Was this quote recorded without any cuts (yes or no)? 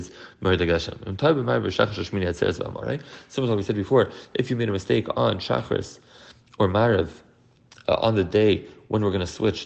yes